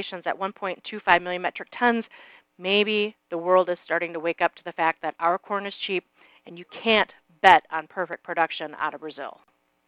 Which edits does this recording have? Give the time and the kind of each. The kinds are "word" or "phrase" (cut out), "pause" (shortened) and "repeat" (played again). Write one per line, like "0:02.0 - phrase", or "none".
none